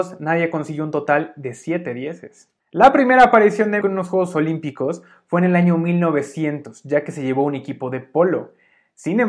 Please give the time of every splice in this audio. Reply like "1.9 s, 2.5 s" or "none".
2.6 s, 3.8 s